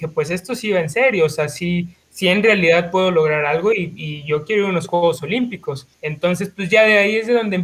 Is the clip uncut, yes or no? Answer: no